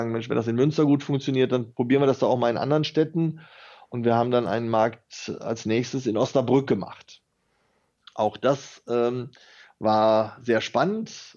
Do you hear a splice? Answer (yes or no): no